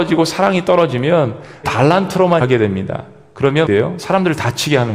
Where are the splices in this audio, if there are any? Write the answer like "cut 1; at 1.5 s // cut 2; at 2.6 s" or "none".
cut 1; at 1.6 s // cut 2; at 2.4 s // cut 3; at 3.7 s